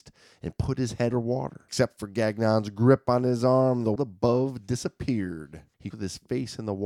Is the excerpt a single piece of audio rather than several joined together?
no; 3 cuts; at 1.1 s, 4.0 s, 5.9 s

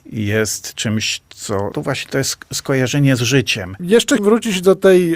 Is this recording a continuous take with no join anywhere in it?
no; 2 cuts; at 1.7 s, 4.2 s

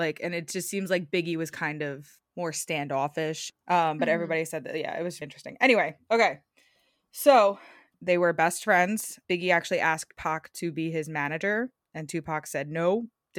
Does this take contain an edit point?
yes; 1 cut; at 5.2 s

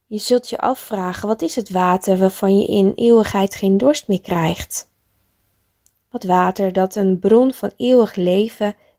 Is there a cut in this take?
yes; 1 cut; at 6.2 s

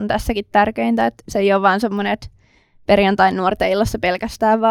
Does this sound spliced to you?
no; 0 cuts

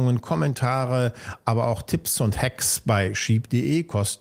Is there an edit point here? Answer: no; 0 cuts

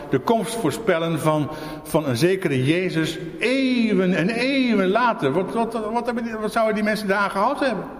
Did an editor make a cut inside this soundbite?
no; 0 cuts

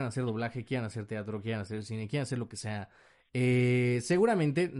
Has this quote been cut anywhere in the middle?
no; 0 cuts

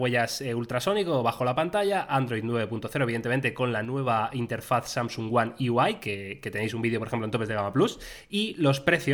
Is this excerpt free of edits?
yes; 0 cuts

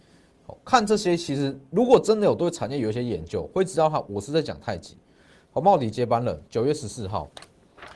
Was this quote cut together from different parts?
no; 0 cuts

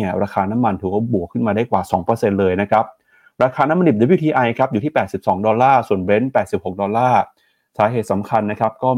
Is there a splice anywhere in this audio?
no; 0 cuts

